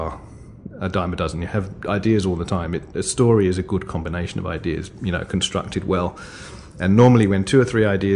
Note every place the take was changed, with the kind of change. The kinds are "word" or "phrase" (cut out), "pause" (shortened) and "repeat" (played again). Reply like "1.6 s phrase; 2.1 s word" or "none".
none